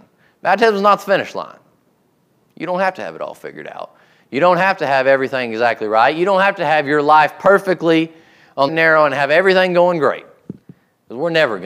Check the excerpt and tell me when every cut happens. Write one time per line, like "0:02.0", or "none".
0:08.7